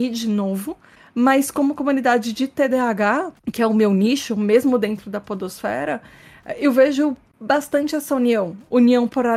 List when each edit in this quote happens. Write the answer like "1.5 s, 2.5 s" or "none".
3.4 s